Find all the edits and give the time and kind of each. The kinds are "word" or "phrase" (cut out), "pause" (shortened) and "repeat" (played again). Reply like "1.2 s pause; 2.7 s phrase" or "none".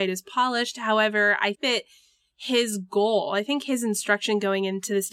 1.5 s word